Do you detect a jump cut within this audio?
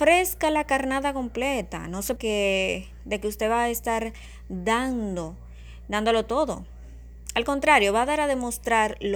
yes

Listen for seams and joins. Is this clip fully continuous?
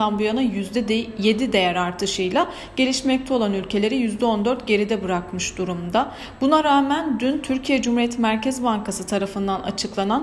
yes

